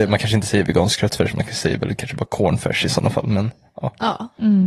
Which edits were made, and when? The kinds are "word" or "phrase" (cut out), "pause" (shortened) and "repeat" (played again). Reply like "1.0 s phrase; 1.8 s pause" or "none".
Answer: none